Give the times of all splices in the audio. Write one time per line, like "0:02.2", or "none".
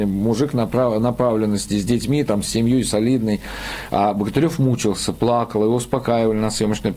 none

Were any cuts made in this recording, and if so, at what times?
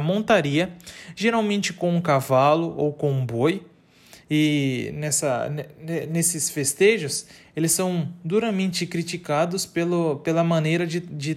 none

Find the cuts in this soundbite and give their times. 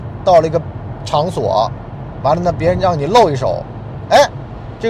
none

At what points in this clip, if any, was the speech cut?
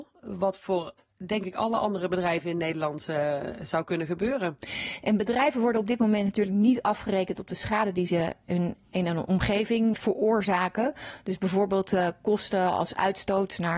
0:09.9

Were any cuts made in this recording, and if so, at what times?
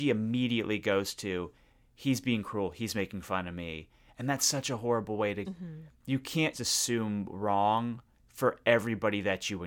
0:05.4
0:06.5

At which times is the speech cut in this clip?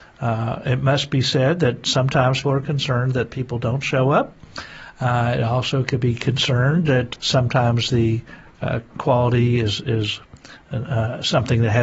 0:02.4
0:07.1

